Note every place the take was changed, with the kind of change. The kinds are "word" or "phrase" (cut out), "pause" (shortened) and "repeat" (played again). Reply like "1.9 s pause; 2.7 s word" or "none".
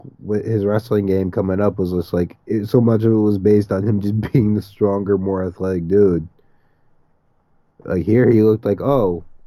none